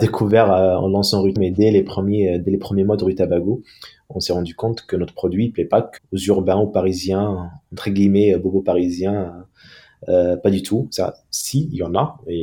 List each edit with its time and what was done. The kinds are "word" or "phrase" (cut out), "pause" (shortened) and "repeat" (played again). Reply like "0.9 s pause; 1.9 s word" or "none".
1.4 s word; 6.0 s word